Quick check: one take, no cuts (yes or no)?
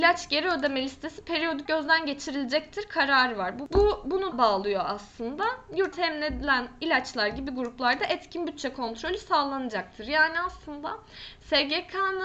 no